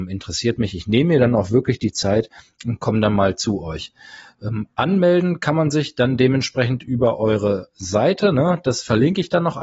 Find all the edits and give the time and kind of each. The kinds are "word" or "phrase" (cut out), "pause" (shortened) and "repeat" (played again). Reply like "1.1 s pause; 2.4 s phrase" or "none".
none